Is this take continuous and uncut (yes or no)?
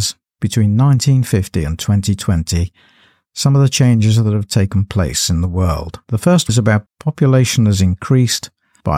no